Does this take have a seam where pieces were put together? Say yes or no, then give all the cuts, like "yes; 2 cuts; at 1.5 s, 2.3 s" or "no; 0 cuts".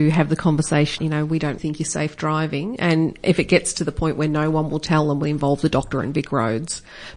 yes; 3 cuts; at 1.0 s, 1.6 s, 5.2 s